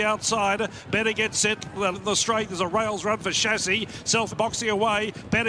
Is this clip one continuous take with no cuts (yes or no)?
no